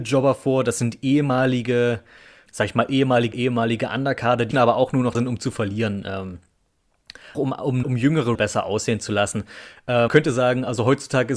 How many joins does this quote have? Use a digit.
8